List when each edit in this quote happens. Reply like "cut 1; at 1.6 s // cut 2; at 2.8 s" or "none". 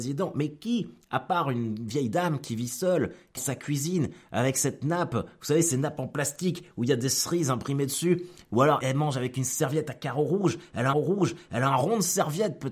cut 1; at 3.4 s // cut 2; at 8.8 s // cut 3; at 10.9 s

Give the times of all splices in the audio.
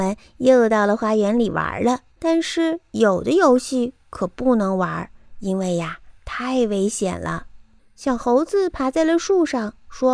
cut 1; at 2.1 s // cut 2; at 7.8 s

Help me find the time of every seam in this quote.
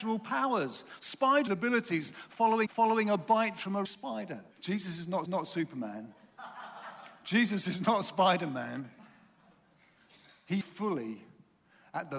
cut 1; at 1.5 s // cut 2; at 2.7 s // cut 3; at 3.8 s // cut 4; at 4.5 s // cut 5; at 5.3 s // cut 6; at 10.6 s

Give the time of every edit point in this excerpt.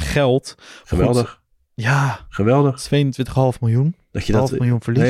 none

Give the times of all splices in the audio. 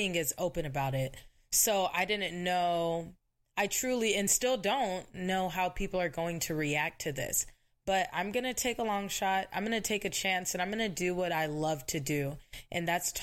none

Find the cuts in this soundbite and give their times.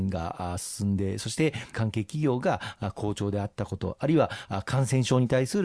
cut 1; at 1.7 s

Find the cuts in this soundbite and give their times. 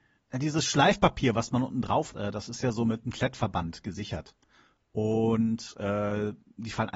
cut 1; at 2.1 s

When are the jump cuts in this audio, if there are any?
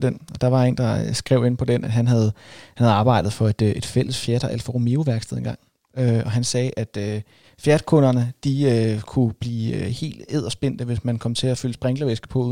none

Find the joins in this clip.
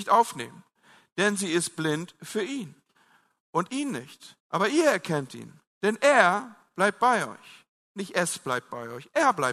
cut 1; at 3.7 s // cut 2; at 4.4 s

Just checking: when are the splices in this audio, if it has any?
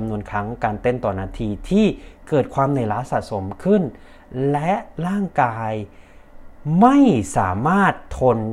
none

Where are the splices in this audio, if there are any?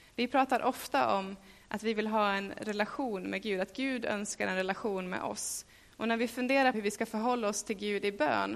cut 1; at 6.7 s

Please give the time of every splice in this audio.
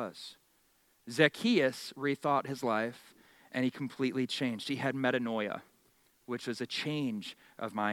none

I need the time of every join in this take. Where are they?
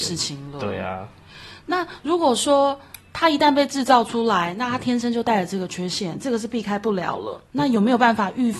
cut 1; at 7.5 s

